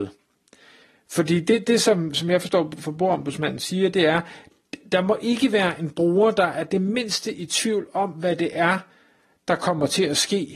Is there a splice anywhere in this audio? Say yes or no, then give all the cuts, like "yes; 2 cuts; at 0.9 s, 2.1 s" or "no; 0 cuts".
no; 0 cuts